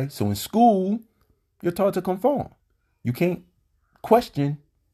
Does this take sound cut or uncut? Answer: uncut